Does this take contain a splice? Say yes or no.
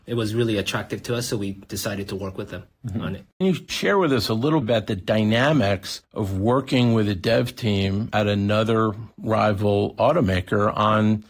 yes